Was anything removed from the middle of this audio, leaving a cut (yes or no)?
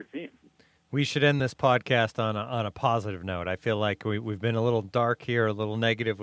no